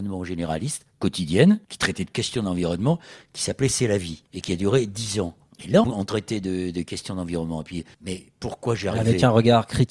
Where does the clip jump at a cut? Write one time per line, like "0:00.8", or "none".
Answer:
0:01.6
0:04.3
0:05.5
0:05.8
0:07.9